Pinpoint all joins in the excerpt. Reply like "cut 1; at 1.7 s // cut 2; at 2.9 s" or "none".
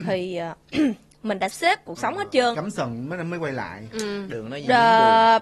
cut 1; at 1.5 s // cut 2; at 2.5 s